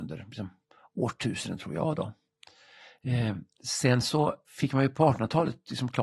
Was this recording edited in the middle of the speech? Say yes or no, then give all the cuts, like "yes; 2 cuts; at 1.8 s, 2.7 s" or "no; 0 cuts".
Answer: no; 0 cuts